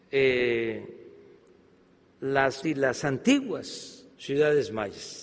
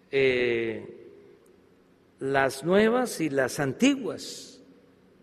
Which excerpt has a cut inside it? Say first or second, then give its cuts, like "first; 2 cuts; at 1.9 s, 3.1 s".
first; 2 cuts; at 2.6 s, 4.1 s